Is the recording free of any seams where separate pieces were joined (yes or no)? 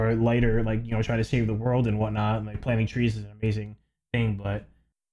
yes